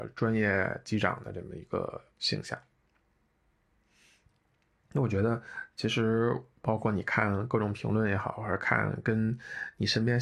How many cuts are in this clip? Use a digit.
1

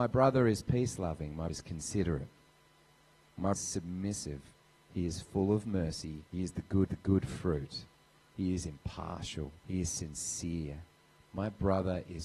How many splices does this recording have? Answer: 5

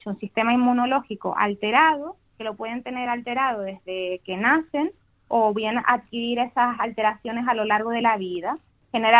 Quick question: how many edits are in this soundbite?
0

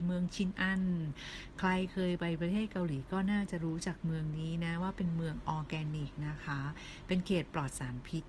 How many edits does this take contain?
0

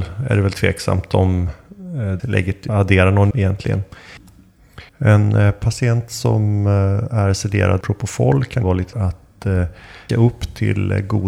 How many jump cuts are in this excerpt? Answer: 8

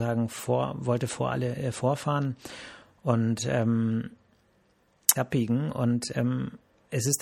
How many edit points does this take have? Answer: 1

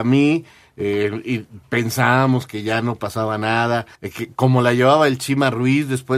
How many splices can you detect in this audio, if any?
1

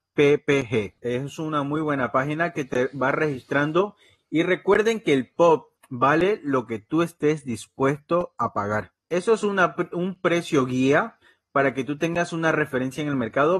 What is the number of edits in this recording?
3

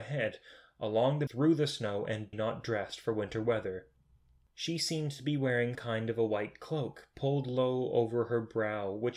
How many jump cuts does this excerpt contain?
3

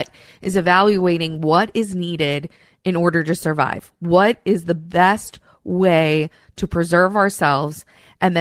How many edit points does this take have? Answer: 0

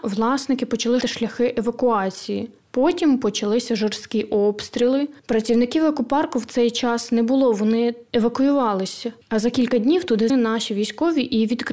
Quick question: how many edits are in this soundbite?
2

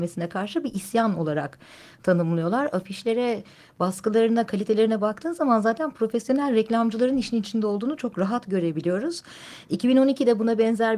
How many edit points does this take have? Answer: 0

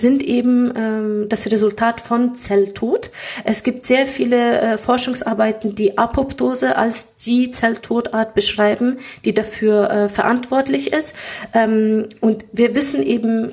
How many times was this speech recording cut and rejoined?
0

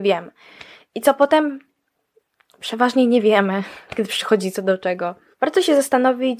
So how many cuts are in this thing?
0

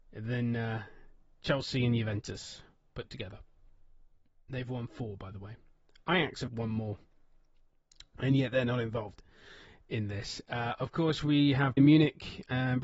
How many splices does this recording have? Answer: 2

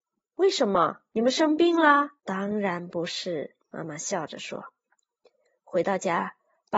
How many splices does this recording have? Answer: 3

